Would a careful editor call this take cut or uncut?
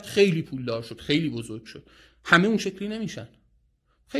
uncut